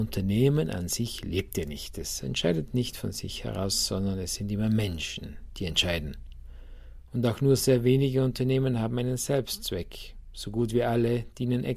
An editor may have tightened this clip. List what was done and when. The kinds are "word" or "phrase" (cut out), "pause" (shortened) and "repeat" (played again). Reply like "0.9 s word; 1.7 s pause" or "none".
none